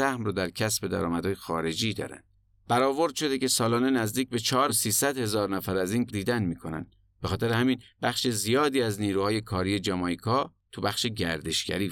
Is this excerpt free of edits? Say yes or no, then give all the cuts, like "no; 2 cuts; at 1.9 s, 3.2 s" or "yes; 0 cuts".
no; 3 cuts; at 2.4 s, 4.7 s, 6.1 s